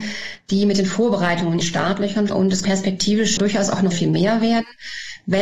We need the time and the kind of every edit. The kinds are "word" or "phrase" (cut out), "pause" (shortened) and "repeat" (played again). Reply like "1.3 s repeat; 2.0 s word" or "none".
1.6 s word; 2.3 s word; 2.6 s word; 3.4 s word; 3.9 s word